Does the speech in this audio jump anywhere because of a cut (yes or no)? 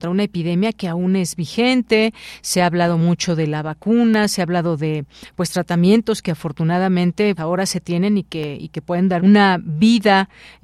yes